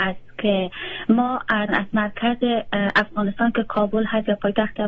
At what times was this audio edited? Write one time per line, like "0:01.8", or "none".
0:01.7